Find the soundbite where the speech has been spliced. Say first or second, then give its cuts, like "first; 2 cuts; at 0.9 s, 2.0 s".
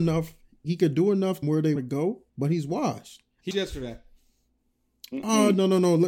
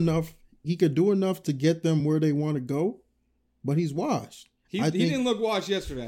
first; 4 cuts; at 1.4 s, 1.8 s, 2.3 s, 3.5 s